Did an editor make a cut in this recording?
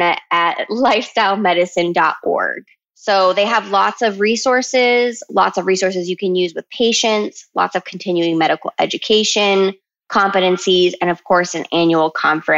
no; 0 cuts

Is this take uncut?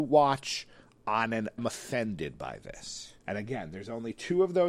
no; 2 cuts; at 1.6 s, 3.2 s

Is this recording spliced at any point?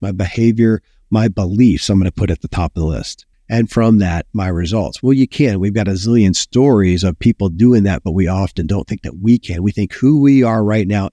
yes; 1 cut; at 3.3 s

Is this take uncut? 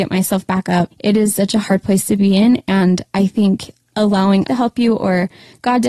no; 2 cuts; at 0.9 s, 4.5 s

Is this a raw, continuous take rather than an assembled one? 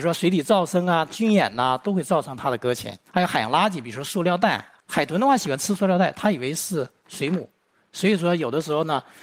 no; 1 cut; at 3.1 s

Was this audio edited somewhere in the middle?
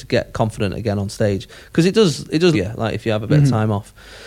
yes; 1 cut; at 2.5 s

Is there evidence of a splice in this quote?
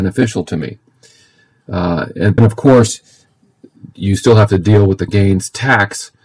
yes; 3 cuts; at 2.4 s, 3.9 s, 5.1 s

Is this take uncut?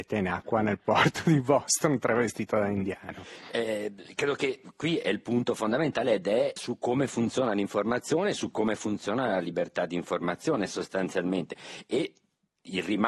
no; 1 cut; at 6.6 s

